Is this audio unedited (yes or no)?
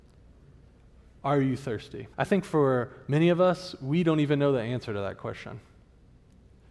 no